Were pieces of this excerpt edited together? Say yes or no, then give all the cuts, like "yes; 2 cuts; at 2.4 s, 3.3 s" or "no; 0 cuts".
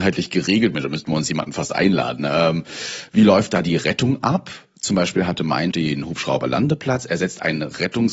yes; 1 cut; at 5.7 s